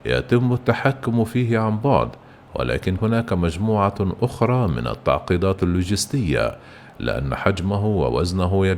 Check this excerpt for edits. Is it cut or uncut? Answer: cut